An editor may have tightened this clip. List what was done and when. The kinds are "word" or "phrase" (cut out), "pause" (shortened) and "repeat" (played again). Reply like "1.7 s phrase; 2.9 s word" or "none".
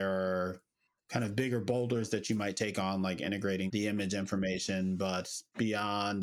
none